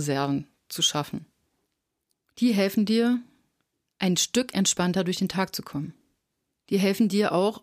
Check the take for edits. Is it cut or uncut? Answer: uncut